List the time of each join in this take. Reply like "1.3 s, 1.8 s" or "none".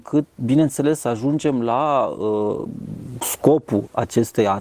none